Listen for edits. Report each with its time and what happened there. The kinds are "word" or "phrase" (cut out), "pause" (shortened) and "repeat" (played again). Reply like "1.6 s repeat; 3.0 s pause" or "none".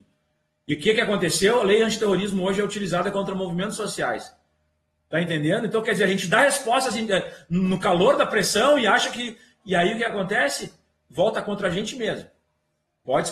none